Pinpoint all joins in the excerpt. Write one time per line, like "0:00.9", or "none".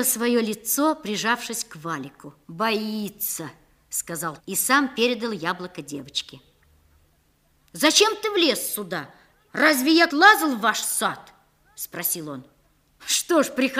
0:02.4
0:04.4
0:10.1